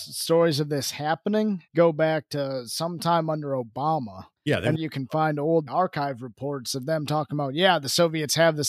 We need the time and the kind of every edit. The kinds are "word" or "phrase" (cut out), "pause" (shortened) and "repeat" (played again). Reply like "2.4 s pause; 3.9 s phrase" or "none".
1.7 s pause; 4.4 s pause; 4.7 s phrase; 5.7 s word

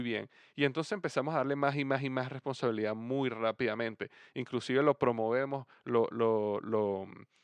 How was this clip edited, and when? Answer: none

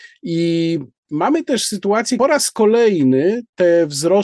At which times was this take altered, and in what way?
2.2 s phrase

